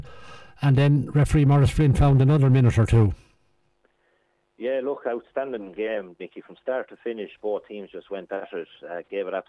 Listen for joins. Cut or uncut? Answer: uncut